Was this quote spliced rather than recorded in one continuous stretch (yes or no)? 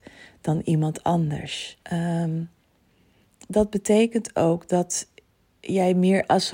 yes